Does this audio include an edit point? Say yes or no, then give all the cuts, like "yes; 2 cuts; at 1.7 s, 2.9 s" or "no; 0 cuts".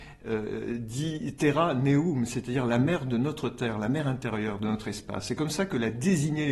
no; 0 cuts